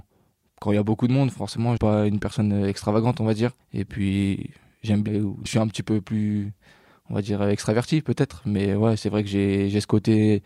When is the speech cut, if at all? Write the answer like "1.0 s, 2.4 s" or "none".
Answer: 1.8 s, 3.6 s, 5.1 s, 5.5 s